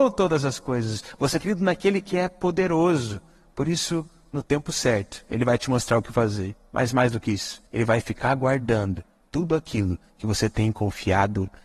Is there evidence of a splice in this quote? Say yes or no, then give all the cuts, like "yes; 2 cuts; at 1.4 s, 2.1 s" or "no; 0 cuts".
yes; 2 cuts; at 1.4 s, 7.7 s